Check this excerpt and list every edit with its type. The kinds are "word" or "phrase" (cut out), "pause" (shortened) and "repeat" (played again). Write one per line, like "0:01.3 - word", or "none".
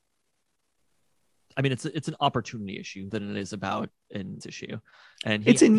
0:03.1 - word
0:04.4 - word